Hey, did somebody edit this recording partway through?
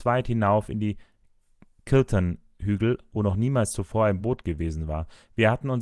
no; 0 cuts

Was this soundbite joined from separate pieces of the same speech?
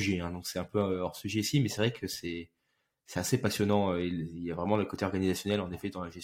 no; 0 cuts

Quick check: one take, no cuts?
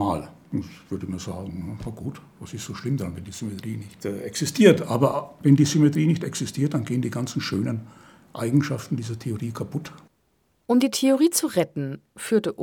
yes; 0 cuts

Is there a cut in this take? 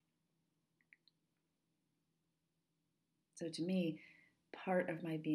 no; 0 cuts

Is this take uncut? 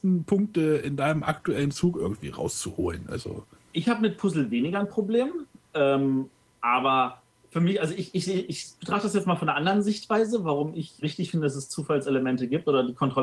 no; 3 cuts; at 3.6 s, 8.1 s, 11.0 s

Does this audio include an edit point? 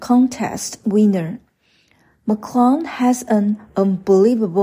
no; 0 cuts

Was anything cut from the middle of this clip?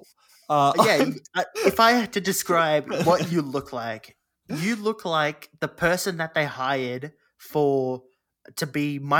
no; 0 cuts

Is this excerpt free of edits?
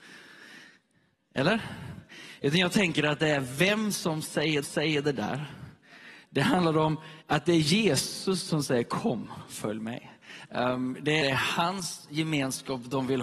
no; 3 cuts; at 4.6 s, 7.2 s, 11.2 s

